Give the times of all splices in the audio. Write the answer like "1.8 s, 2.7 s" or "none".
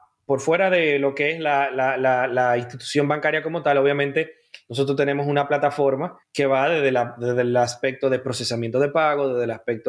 6.2 s